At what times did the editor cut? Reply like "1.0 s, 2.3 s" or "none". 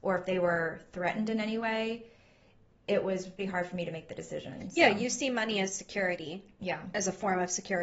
3.4 s

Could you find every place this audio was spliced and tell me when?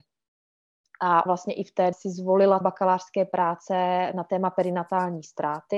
1.3 s, 1.9 s, 2.6 s

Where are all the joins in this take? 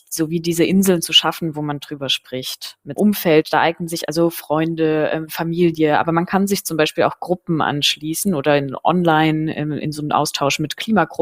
3.0 s

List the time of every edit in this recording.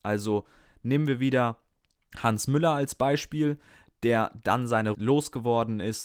4.9 s

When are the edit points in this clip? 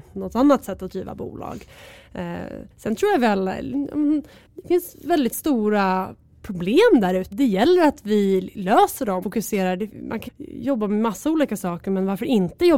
2.7 s, 4.5 s, 7.3 s, 9.2 s, 10.3 s

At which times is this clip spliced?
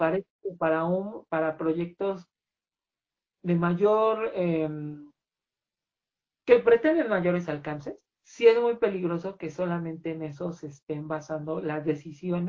8.1 s

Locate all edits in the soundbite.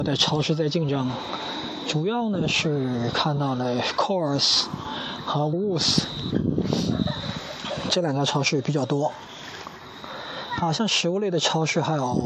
5.5 s

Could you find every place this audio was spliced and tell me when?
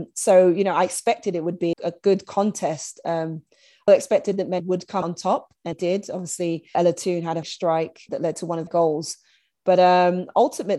1.7 s, 3.9 s, 4.6 s, 5.0 s, 5.7 s, 6.7 s, 7.4 s, 8.1 s, 8.7 s

